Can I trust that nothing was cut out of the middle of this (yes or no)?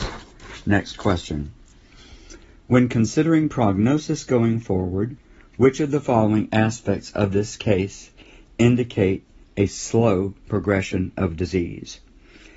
yes